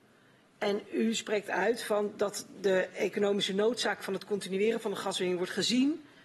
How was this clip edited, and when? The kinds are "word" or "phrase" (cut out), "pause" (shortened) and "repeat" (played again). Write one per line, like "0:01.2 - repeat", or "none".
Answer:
none